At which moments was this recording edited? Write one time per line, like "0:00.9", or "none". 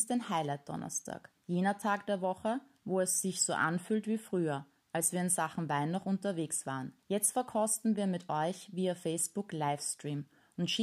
0:01.4
0:07.0